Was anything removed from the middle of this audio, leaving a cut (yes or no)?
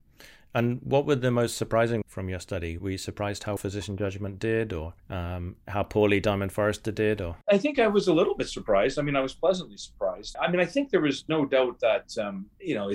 yes